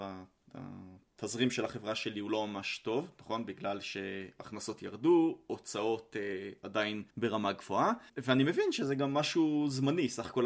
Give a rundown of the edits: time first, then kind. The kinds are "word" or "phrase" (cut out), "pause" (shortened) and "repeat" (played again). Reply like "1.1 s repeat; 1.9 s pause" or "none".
7.1 s pause; 8.1 s pause